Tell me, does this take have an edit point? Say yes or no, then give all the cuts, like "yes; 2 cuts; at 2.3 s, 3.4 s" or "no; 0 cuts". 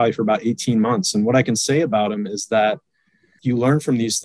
no; 0 cuts